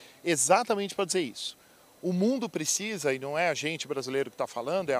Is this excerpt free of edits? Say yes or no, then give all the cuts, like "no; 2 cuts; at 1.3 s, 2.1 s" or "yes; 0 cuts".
yes; 0 cuts